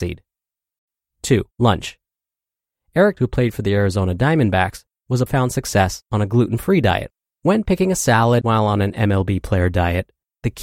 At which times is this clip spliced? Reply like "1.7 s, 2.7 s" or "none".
1.5 s, 3.2 s, 5.3 s, 7.2 s, 8.4 s